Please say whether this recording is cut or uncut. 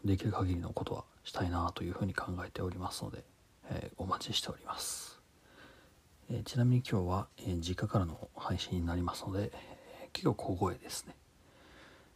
uncut